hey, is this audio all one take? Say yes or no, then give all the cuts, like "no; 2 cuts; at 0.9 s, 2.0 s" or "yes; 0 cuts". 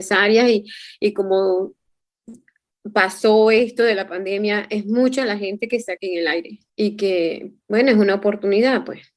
no; 2 cuts; at 6.0 s, 6.7 s